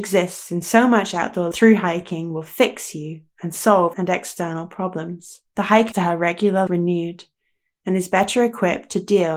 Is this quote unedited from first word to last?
no; 5 cuts; at 1.5 s, 3.9 s, 5.5 s, 5.9 s, 6.7 s

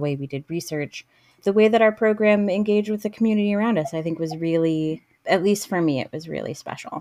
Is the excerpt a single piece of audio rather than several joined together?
no; 2 cuts; at 1.4 s, 5.2 s

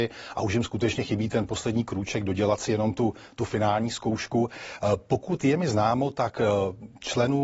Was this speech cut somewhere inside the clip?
no; 0 cuts

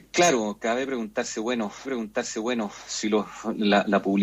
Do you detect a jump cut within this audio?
yes; 1 cut; at 1.8 s

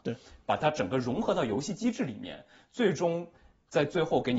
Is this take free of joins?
yes; 0 cuts

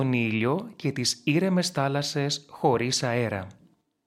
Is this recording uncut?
yes; 0 cuts

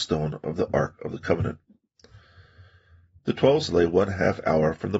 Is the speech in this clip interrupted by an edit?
yes; 1 cut; at 3.7 s

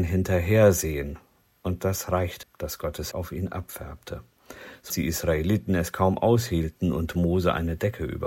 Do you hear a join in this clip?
yes; 3 cuts; at 2.4 s, 3.1 s, 4.9 s

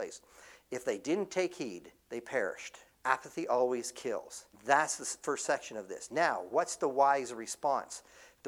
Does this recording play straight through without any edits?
no; 3 cuts; at 2.0 s, 2.9 s, 4.5 s

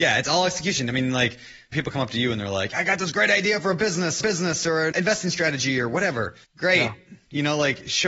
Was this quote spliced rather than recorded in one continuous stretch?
yes; 4 cuts; at 1.7 s, 4.2 s, 4.9 s, 6.4 s

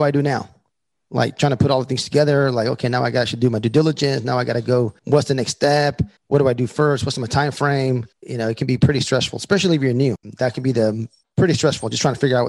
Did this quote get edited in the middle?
yes; 3 cuts; at 5.0 s, 6.2 s, 8.1 s

